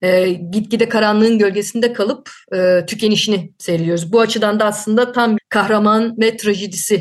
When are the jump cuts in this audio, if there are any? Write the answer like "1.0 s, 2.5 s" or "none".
5.4 s